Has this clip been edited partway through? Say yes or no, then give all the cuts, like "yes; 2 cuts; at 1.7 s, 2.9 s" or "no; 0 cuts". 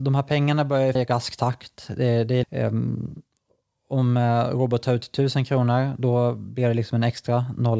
yes; 2 cuts; at 1.0 s, 2.4 s